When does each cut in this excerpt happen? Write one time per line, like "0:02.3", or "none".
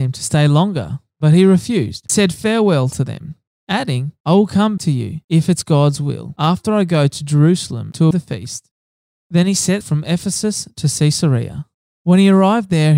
0:02.1
0:04.8
0:08.1
0:09.8